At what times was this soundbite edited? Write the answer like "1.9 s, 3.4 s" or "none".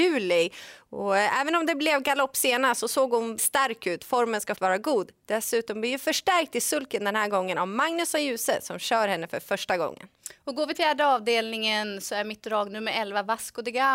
3.4 s, 4.5 s, 10.7 s